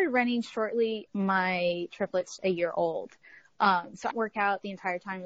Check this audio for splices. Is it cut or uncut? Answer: cut